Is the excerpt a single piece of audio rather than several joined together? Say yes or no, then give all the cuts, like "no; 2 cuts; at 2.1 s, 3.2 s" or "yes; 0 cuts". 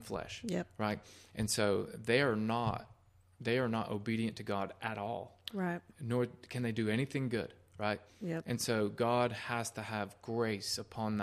yes; 0 cuts